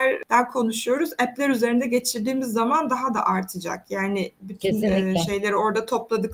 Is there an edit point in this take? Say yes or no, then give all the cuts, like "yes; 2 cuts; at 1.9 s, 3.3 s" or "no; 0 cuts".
no; 0 cuts